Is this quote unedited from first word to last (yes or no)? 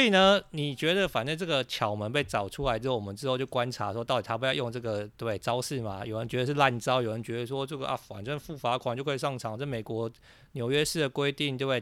yes